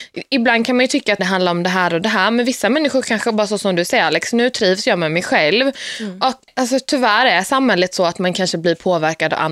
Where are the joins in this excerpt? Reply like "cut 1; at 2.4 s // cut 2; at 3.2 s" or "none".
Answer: cut 1; at 1.2 s